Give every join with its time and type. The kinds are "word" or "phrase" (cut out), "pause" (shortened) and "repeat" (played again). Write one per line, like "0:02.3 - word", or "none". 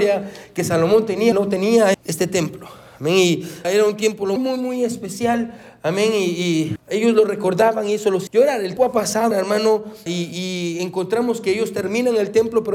0:01.3 - word
0:01.9 - word
0:03.6 - word
0:04.4 - word
0:06.8 - word
0:08.3 - word
0:08.8 - word
0:09.3 - word
0:10.1 - word

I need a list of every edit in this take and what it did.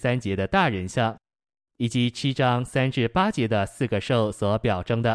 none

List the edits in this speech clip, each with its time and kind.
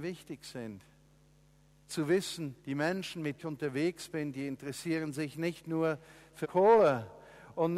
0:02.6 - pause
0:03.4 - phrase
0:06.4 - word

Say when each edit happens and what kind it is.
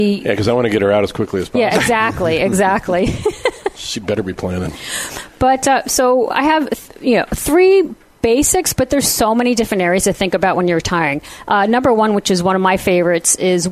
none

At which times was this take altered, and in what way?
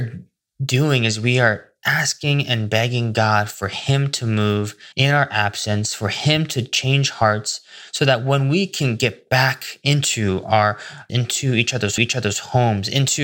0:04.9 - pause
0:11.1 - word
0:12.0 - repeat

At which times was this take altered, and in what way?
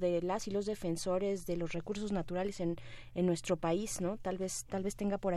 none

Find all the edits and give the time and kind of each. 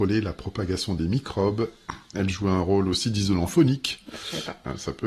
none

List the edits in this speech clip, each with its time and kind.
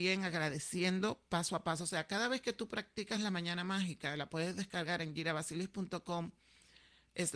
none

